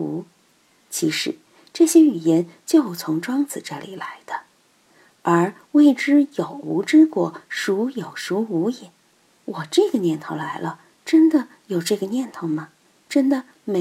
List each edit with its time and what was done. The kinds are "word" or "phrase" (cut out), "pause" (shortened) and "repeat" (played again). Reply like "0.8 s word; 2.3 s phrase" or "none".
none

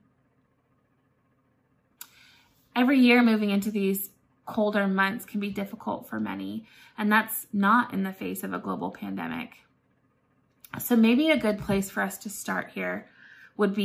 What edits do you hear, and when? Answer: none

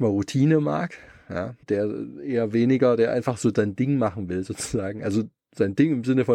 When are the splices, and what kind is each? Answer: 1.6 s pause

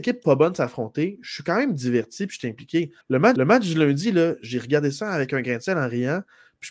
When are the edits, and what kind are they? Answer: 3.0 s pause; 3.4 s repeat

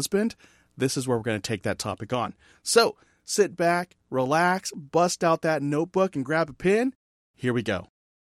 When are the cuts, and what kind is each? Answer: none

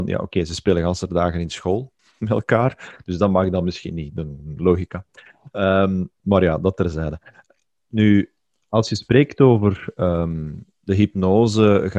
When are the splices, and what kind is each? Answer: 2.0 s pause

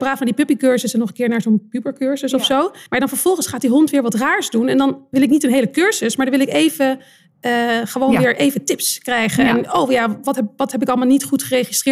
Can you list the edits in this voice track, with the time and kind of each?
2.9 s pause

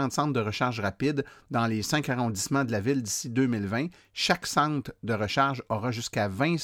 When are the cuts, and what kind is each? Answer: none

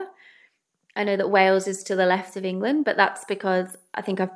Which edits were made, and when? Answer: none

